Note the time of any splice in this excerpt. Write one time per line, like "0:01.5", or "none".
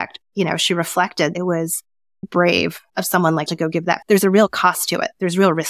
0:01.3
0:02.2
0:02.9
0:03.5
0:04.0